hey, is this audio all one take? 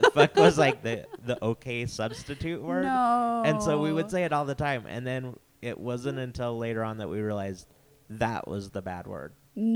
yes; 0 cuts

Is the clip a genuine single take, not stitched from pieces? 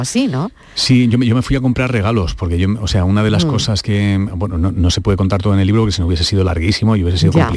yes; 0 cuts

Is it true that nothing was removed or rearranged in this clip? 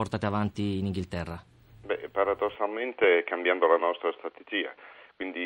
yes; 0 cuts

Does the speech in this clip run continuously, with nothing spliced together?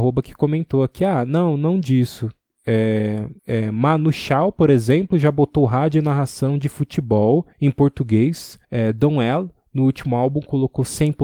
no; 3 cuts; at 3.4 s, 7.5 s, 8.6 s

